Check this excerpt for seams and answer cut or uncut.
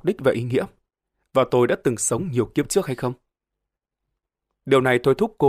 uncut